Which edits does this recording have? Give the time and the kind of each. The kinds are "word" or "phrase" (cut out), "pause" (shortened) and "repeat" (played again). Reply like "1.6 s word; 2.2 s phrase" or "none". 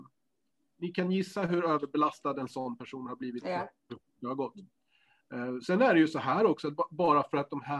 none